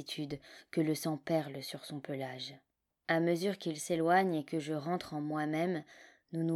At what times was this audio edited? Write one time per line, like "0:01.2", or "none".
0:02.9